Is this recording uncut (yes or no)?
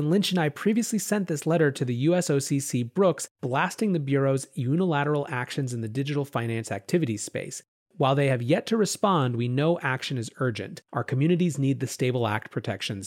no